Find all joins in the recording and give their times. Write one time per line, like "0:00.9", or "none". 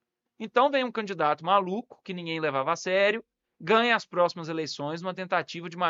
none